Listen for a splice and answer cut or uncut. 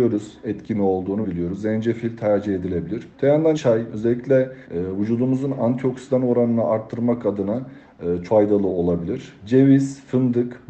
cut